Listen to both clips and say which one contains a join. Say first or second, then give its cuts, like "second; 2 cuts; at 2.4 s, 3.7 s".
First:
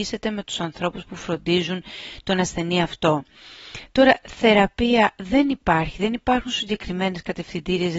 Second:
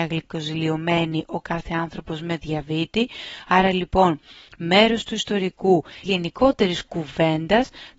second; 1 cut; at 6.1 s